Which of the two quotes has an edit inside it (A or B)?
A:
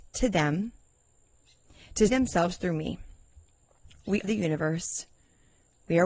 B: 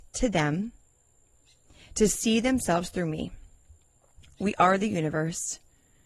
A